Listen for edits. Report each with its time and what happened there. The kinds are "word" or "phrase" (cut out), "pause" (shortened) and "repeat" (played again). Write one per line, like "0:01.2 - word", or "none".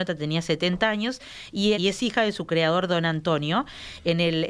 0:01.7 - word